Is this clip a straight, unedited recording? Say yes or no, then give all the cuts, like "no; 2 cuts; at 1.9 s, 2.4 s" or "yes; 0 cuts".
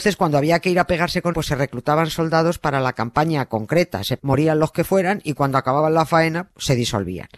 no; 3 cuts; at 1.3 s, 4.2 s, 6.5 s